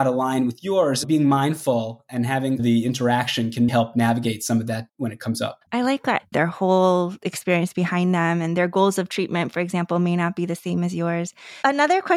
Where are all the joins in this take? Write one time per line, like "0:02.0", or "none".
0:02.6
0:03.7
0:04.9
0:05.7
0:06.3